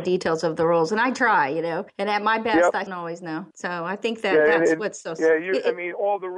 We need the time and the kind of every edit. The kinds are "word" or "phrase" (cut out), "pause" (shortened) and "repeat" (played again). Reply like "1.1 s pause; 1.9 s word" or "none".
1.9 s pause; 2.9 s phrase; 3.5 s pause